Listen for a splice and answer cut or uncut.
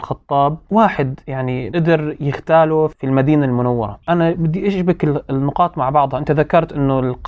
cut